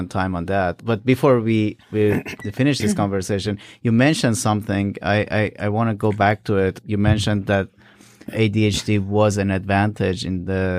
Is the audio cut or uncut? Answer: uncut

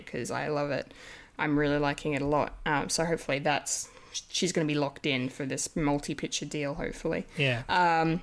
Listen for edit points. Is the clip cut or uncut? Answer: uncut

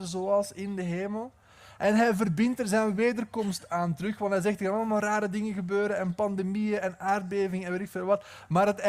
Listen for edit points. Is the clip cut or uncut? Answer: uncut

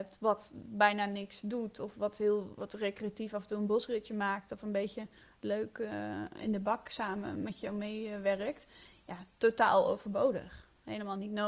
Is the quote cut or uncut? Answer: uncut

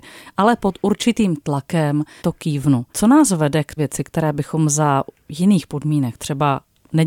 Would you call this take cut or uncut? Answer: cut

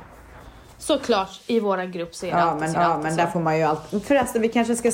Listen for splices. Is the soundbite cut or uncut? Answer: cut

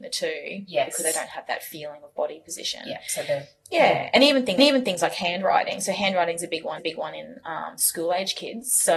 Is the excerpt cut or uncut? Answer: cut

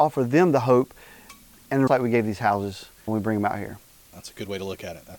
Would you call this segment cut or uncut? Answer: cut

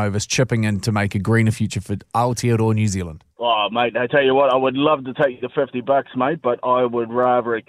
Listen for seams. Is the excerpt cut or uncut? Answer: cut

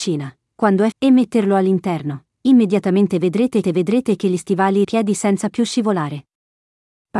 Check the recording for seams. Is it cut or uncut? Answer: cut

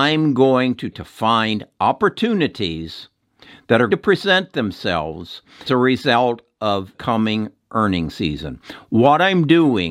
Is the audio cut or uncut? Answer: cut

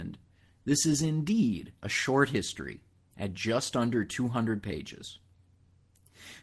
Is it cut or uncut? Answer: uncut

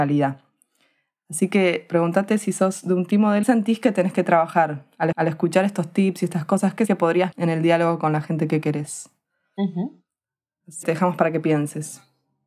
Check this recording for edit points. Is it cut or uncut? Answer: cut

